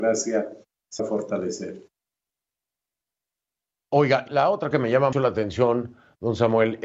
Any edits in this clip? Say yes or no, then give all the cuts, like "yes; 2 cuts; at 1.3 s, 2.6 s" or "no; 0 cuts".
yes; 4 cuts; at 1.0 s, 4.3 s, 4.7 s, 5.1 s